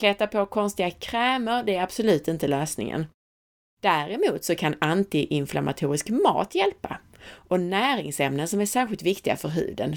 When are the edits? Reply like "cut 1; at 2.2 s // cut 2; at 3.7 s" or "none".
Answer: none